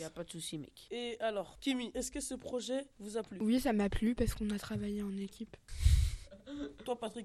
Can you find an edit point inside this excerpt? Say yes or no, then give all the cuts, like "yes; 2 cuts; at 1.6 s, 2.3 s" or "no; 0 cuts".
yes; 1 cut; at 2.9 s